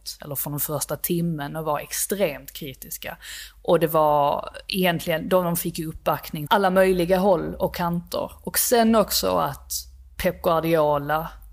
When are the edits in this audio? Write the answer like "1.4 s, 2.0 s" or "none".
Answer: 6.5 s